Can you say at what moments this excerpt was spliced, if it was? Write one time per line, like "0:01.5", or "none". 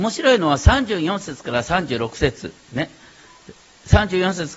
none

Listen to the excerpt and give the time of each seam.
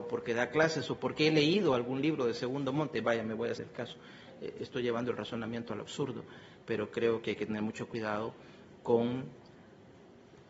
0:03.6

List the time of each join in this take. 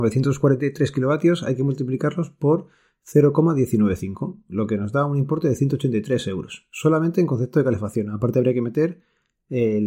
none

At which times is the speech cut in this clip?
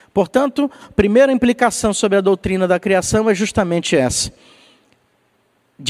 none

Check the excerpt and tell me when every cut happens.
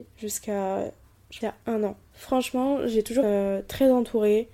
0:01.4
0:02.0
0:03.2

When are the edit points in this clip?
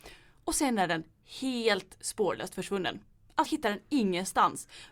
0:03.5

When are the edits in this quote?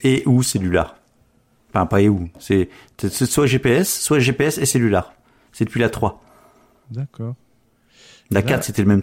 none

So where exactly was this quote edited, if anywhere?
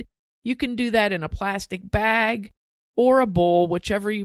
none

